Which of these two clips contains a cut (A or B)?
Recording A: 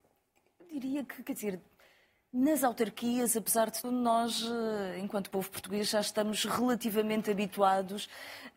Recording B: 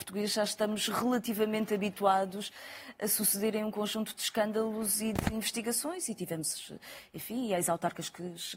A